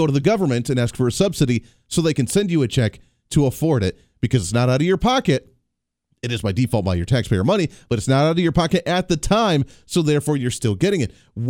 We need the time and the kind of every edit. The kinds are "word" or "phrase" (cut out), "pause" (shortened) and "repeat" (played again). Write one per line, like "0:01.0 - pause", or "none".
none